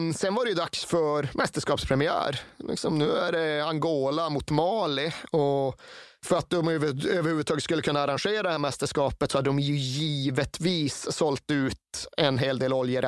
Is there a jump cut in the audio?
no; 0 cuts

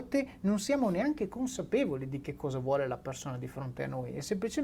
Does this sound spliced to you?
no; 0 cuts

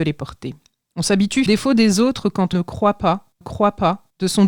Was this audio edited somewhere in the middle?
yes; 3 cuts; at 1.5 s, 2.5 s, 3.4 s

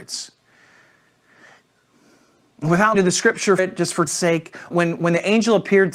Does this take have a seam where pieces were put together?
yes; 4 cuts; at 2.9 s, 3.6 s, 4.1 s, 4.7 s

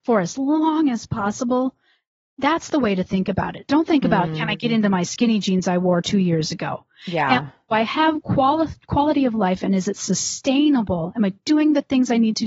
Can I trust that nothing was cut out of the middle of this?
yes; 0 cuts

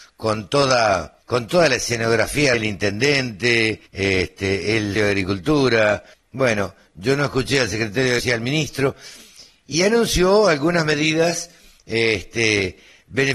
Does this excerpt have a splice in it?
yes; 6 cuts; at 1.2 s, 2.5 s, 3.9 s, 5.0 s, 6.1 s, 8.2 s

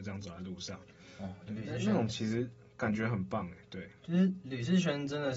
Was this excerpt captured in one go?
yes; 0 cuts

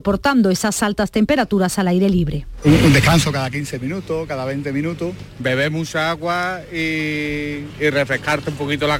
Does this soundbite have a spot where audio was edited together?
no; 0 cuts

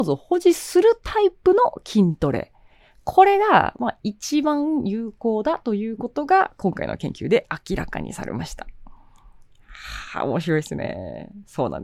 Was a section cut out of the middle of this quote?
no; 0 cuts

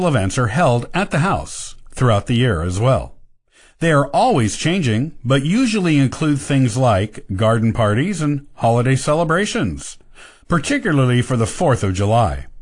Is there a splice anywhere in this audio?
no; 0 cuts

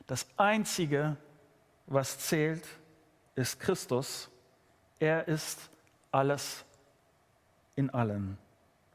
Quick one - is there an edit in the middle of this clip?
no; 0 cuts

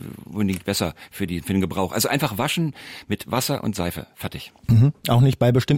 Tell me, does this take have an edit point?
no; 0 cuts

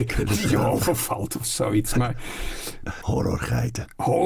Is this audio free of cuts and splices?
no; 1 cut; at 3.0 s

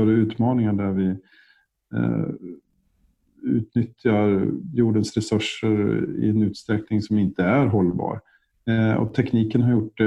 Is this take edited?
no; 0 cuts

